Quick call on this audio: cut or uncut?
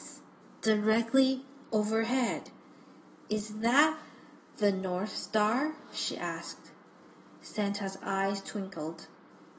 uncut